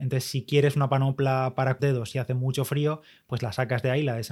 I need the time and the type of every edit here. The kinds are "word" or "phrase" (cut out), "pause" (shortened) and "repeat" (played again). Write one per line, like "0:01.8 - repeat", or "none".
0:01.8 - phrase